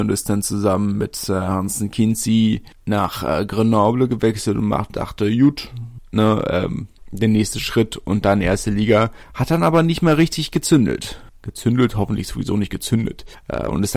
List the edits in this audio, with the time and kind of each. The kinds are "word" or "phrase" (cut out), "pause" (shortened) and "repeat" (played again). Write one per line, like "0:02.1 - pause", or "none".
none

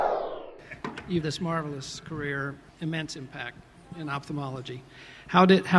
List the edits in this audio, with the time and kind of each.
0:01.2 - word
0:02.7 - pause

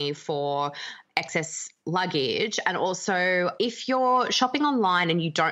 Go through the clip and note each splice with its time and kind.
0:03.6 - word

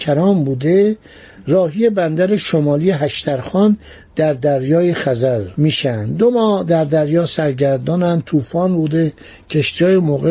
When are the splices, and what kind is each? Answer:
none

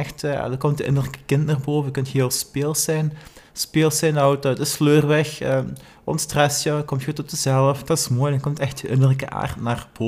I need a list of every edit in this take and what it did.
none

